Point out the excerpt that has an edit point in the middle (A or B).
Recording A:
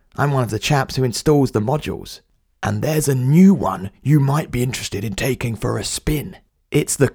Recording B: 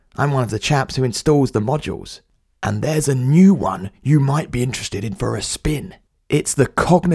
B